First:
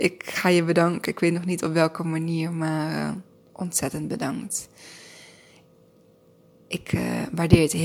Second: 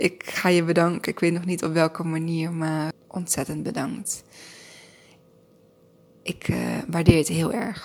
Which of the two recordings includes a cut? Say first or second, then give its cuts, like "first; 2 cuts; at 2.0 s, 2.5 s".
second; 1 cut; at 2.9 s